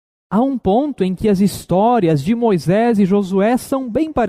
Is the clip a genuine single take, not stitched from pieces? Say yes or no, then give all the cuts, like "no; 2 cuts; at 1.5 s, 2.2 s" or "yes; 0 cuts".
yes; 0 cuts